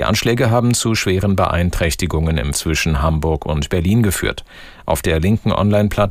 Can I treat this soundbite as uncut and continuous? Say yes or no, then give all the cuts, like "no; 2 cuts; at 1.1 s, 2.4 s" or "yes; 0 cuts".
no; 1 cut; at 2.5 s